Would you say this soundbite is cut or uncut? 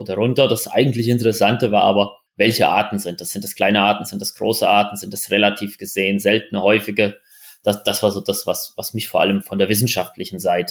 uncut